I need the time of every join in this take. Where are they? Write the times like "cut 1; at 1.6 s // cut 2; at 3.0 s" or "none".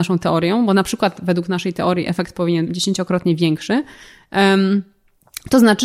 cut 1; at 2.7 s

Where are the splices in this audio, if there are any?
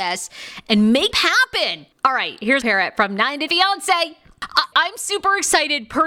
cut 1; at 1.1 s // cut 2; at 1.9 s // cut 3; at 2.6 s // cut 4; at 3.5 s // cut 5; at 4.7 s

